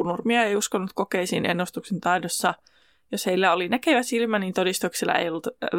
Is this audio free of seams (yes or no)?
yes